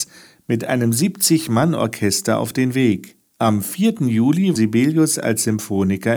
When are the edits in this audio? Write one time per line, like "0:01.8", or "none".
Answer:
0:03.3
0:04.6